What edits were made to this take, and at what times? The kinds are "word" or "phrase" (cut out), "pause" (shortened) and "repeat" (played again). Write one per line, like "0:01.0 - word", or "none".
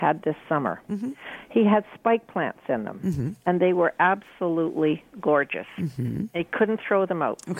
0:03.4 - pause

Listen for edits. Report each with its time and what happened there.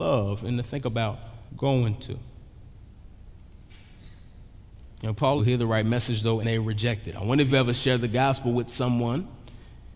0:01.5 - pause
0:05.4 - phrase
0:06.4 - word
0:07.5 - word

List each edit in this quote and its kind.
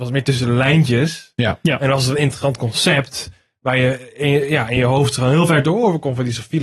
none

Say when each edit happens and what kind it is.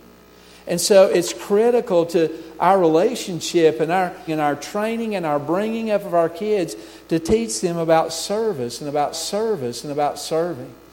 0:04.3 - word
0:09.1 - repeat

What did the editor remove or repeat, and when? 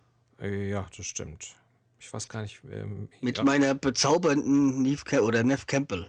none

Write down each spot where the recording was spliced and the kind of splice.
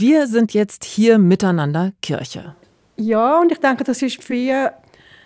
0:04.3 - word

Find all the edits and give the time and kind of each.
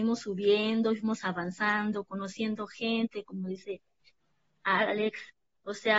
none

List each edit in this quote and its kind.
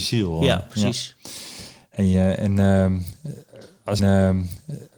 0:04.0 - repeat

